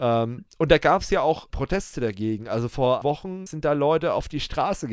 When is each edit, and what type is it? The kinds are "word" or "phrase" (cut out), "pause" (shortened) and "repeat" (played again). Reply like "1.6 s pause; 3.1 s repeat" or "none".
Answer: 1.5 s word; 3.0 s word; 3.5 s word